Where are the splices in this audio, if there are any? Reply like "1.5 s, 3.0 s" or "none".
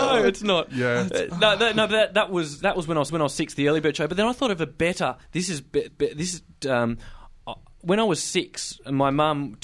3.1 s, 5.2 s, 5.9 s